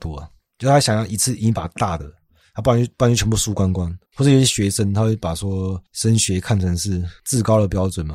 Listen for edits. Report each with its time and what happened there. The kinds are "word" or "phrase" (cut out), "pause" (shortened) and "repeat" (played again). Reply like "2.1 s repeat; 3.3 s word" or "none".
4.1 s pause; 5.9 s pause

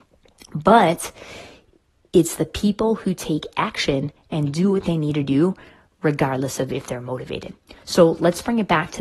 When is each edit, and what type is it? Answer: none

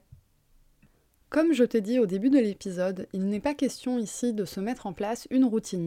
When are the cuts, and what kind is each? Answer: none

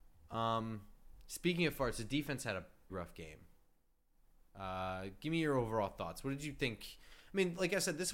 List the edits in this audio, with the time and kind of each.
2.9 s word

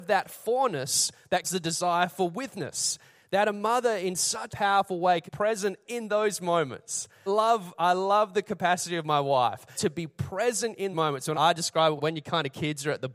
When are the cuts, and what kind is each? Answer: 1.4 s word; 4.5 s word; 5.3 s word; 5.9 s word; 7.3 s word; 9.8 s word; 10.9 s word; 11.3 s word; 12.0 s word

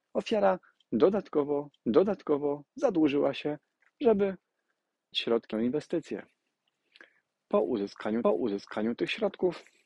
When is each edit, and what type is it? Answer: 1.7 s repeat; 5.1 s word; 5.5 s phrase; 8.2 s repeat

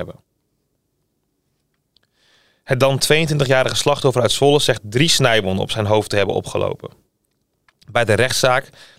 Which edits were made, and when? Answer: none

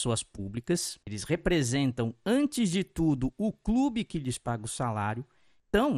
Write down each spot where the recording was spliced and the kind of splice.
1.0 s pause

